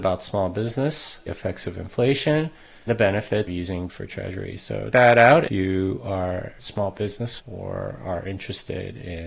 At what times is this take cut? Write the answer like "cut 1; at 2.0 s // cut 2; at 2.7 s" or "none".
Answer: cut 1; at 1.3 s // cut 2; at 2.9 s // cut 3; at 3.5 s // cut 4; at 3.9 s // cut 5; at 4.9 s // cut 6; at 5.5 s // cut 7; at 6.6 s // cut 8; at 7.4 s